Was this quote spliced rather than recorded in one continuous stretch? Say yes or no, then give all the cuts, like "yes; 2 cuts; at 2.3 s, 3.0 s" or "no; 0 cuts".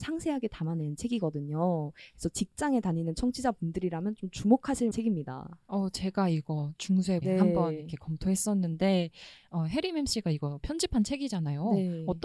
yes; 2 cuts; at 4.9 s, 7.2 s